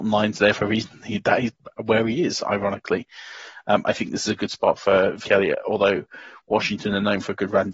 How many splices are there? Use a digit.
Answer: 1